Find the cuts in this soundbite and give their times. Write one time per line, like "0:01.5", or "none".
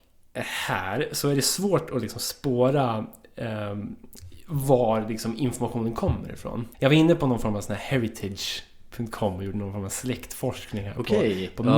0:06.7